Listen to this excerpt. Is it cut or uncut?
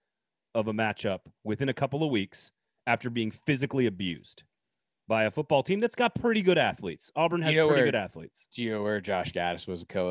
uncut